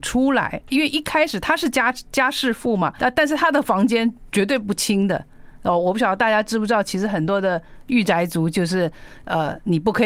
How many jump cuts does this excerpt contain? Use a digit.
1